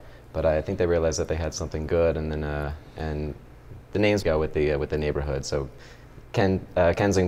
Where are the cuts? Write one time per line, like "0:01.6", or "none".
0:04.2